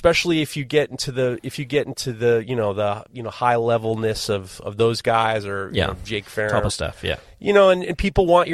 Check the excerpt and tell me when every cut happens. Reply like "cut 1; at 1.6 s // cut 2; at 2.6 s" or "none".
cut 1; at 6.7 s